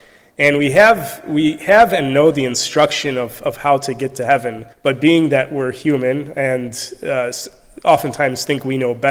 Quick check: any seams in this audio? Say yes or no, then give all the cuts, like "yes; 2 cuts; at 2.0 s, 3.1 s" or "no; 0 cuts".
yes; 1 cut; at 4.7 s